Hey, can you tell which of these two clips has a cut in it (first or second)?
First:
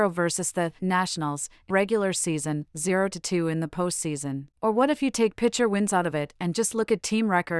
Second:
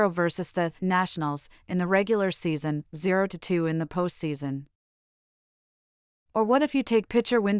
first